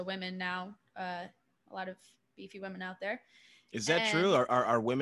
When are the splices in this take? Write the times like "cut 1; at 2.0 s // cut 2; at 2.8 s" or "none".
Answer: none